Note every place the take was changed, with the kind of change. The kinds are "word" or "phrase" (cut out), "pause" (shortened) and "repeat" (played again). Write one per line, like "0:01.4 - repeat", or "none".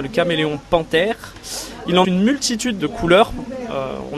0:02.0 - word
0:02.8 - word